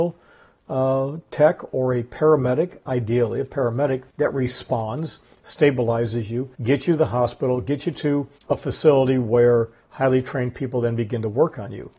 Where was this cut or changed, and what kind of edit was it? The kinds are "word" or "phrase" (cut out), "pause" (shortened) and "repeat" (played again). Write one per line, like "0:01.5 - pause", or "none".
0:04.1 - pause
0:06.5 - pause
0:08.4 - pause